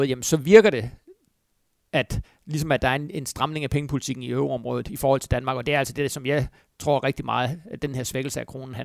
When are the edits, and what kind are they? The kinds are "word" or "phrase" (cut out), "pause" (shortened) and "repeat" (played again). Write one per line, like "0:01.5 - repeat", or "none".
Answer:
none